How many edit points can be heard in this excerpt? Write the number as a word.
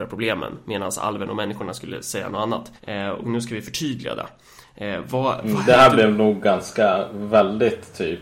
one